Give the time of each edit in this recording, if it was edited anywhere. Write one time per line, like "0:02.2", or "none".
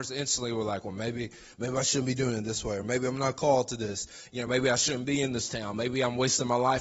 none